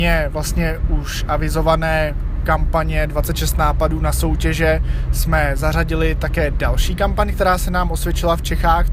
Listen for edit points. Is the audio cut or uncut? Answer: uncut